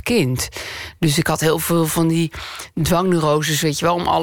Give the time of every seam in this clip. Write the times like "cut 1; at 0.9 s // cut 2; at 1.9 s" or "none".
none